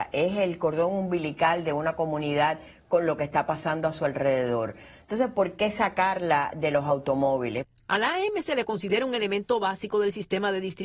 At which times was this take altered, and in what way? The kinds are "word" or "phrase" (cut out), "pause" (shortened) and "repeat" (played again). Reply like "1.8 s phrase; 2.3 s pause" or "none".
none

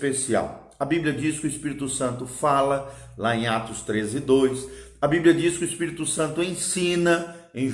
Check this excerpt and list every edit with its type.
none

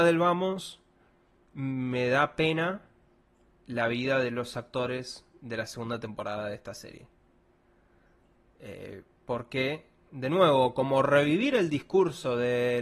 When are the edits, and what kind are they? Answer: none

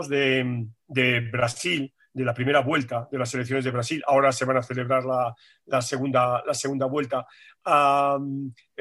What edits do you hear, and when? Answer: none

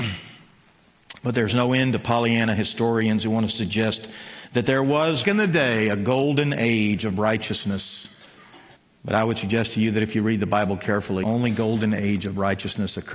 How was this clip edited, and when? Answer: 5.2 s word; 8.8 s pause; 11.2 s phrase

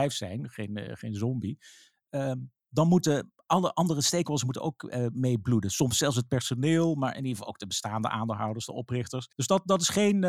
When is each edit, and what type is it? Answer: 9.3 s pause

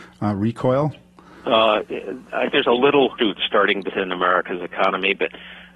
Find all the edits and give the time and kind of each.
2.5 s word; 3.2 s word; 3.9 s word

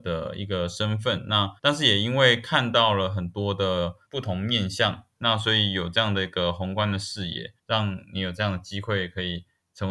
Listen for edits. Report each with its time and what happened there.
1.6 s pause; 4.1 s pause; 7.6 s pause

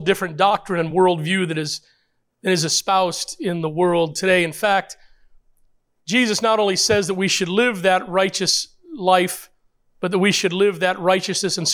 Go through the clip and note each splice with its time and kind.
none

